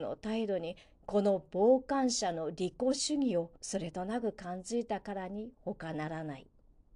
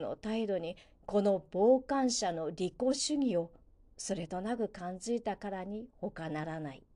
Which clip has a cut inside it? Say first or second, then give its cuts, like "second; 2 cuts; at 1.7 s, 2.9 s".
first; 1 cut; at 3.6 s